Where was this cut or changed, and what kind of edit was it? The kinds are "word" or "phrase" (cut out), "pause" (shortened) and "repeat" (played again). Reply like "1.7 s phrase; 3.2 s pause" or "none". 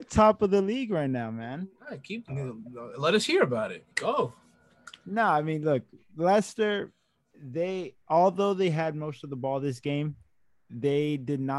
1.8 s pause; 3.9 s pause; 8.0 s pause